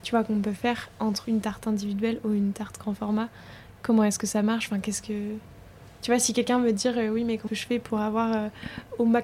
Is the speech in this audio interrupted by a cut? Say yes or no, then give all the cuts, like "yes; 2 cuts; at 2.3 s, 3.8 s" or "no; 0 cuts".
yes; 2 cuts; at 1.2 s, 7.5 s